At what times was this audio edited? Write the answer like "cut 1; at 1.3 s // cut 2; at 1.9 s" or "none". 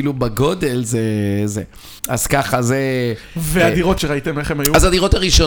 cut 1; at 2.0 s // cut 2; at 4.0 s